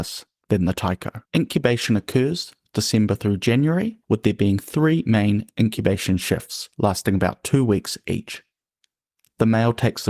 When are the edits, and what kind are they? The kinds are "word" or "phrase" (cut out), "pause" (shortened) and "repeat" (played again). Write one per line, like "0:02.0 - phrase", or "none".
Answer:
0:01.3 - pause
0:04.0 - pause
0:06.7 - pause

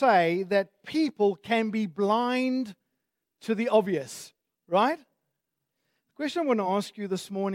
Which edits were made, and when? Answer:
none

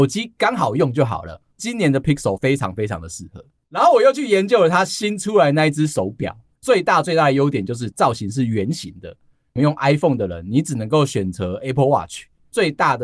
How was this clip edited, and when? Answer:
none

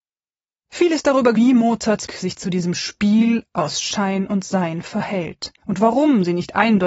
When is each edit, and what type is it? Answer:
0:01.3 - phrase
0:02.1 - word
0:05.6 - pause

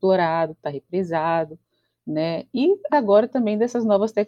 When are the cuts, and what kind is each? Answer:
0:02.9 - word

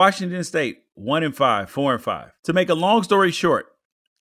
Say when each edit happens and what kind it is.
0:02.4 - pause

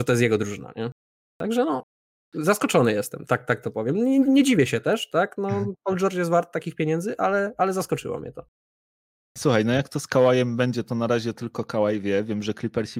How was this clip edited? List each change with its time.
none

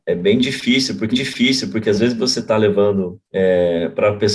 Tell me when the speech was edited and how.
0:01.1 - repeat
0:03.3 - pause

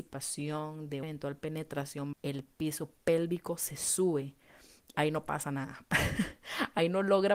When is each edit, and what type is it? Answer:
0:01.0 - word
0:02.1 - word
0:04.9 - word

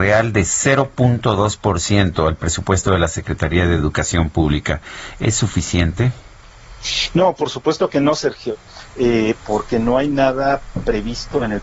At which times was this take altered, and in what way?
none

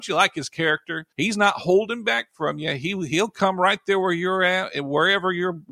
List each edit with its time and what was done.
0:01.1 - pause

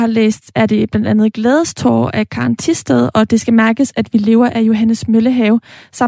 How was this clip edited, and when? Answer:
none

